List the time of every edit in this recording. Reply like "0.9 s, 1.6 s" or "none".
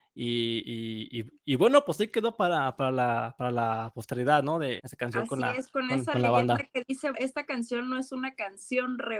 4.8 s, 7.1 s